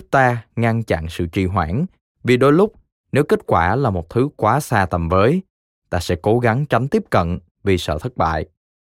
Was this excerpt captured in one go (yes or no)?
yes